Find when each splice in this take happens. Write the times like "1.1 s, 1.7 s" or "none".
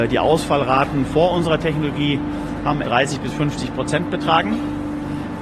2.8 s